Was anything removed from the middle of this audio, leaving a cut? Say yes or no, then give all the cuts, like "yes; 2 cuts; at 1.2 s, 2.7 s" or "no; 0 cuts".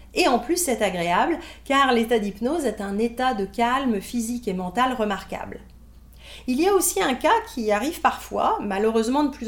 no; 0 cuts